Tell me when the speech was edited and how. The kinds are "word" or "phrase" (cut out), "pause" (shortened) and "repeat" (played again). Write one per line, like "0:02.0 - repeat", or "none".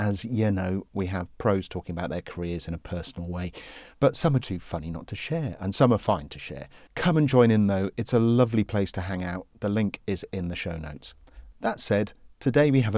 0:03.9 - pause
0:04.4 - word